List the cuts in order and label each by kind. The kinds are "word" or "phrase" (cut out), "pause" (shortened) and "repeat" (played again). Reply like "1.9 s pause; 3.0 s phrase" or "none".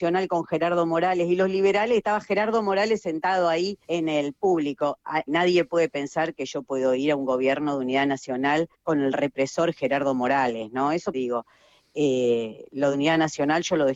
3.8 s pause; 5.3 s word; 8.7 s pause; 11.1 s phrase; 12.9 s phrase